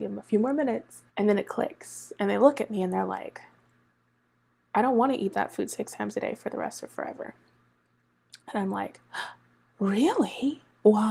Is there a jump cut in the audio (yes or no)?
yes